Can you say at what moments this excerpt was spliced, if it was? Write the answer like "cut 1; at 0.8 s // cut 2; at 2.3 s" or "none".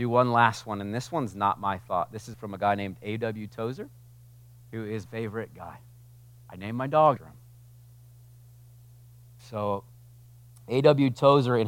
cut 1; at 2.3 s // cut 2; at 5.1 s // cut 3; at 7.2 s